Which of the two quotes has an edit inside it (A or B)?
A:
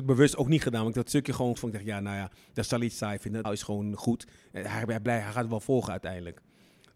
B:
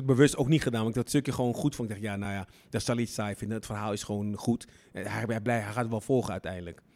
A